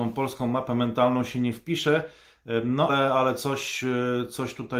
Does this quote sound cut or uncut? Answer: cut